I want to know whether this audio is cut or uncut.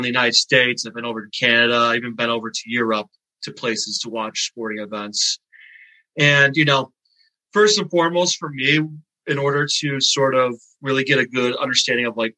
uncut